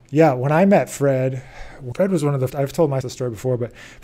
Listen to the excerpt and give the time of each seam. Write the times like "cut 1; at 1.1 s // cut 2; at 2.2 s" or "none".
cut 1; at 1.9 s // cut 2; at 2.5 s // cut 3; at 3.0 s